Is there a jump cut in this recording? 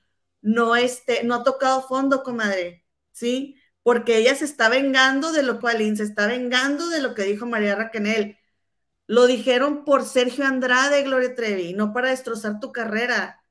yes; 1 cut; at 5.6 s

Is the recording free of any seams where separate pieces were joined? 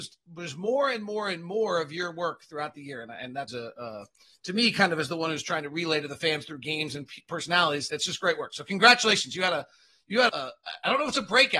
no; 3 cuts; at 3.5 s, 7.9 s, 10.3 s

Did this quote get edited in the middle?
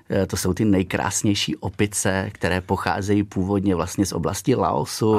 no; 0 cuts

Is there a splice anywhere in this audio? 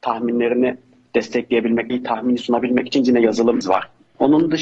yes; 4 cuts; at 1.9 s, 2.4 s, 3.0 s, 3.6 s

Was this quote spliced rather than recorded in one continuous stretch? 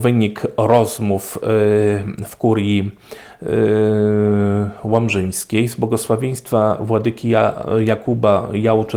no; 0 cuts

